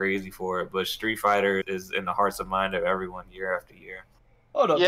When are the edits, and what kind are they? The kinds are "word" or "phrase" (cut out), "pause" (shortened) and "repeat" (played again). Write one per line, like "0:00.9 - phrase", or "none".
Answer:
0:01.6 - word

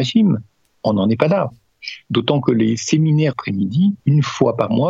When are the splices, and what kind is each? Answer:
0:03.3 - phrase
0:04.0 - pause

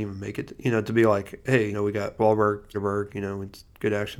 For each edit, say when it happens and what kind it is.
0:01.7 - word
0:02.2 - word
0:02.7 - word

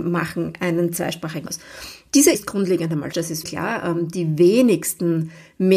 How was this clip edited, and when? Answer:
0:01.5 - word
0:02.3 - word
0:03.1 - word
0:03.4 - word

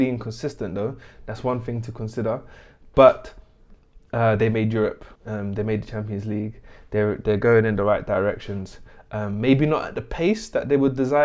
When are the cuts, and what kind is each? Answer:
0:05.2 - pause

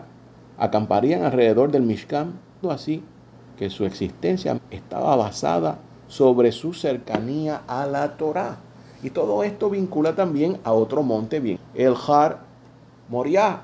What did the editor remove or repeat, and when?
0:02.6 - word
0:04.6 - word
0:11.5 - word

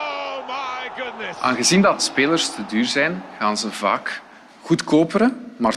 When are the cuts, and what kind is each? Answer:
0:02.0 - word

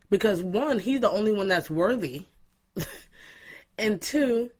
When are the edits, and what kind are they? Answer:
none

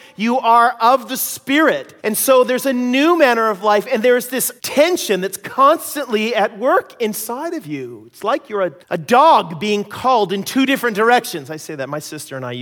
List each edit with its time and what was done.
0:02.0 - pause
0:04.6 - pause
0:08.8 - pause

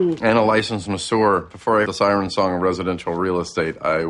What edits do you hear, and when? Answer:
0:01.9 - word

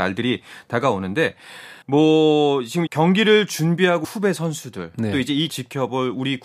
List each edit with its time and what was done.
0:01.8 - pause
0:02.9 - word
0:04.0 - word
0:05.5 - word

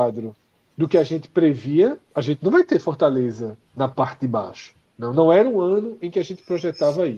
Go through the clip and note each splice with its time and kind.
0:02.0 - pause
0:03.6 - pause

